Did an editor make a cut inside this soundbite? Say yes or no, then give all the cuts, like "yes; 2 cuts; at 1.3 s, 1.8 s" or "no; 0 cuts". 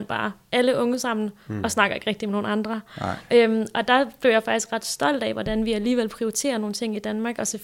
no; 0 cuts